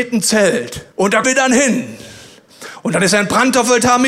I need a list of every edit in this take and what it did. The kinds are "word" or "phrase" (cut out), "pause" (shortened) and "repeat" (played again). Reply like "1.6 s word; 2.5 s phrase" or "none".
0.9 s pause; 1.2 s word